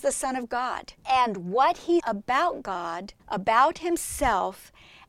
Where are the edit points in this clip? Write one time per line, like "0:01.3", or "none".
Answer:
0:01.0
0:02.0
0:03.2